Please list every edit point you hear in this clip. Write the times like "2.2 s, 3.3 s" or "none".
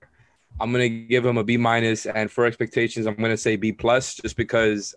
none